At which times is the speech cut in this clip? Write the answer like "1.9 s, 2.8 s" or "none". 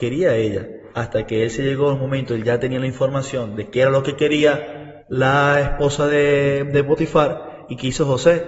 0.9 s, 5.0 s